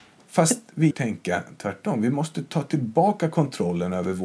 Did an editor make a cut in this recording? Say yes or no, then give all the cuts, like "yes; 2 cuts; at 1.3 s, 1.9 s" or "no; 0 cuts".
yes; 1 cut; at 0.9 s